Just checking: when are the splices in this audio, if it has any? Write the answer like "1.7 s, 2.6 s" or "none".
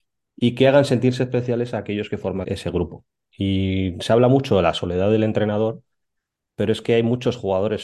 2.4 s